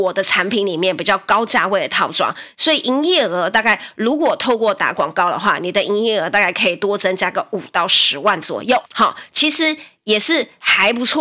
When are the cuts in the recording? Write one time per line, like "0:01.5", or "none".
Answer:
0:08.9